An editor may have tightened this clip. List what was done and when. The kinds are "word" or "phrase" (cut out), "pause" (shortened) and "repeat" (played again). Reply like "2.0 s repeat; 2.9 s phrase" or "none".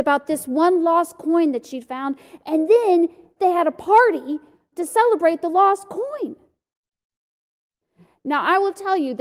none